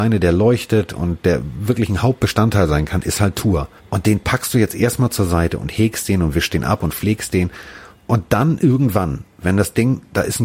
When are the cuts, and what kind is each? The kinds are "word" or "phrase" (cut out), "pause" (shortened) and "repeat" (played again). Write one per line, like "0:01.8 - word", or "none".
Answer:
0:03.8 - pause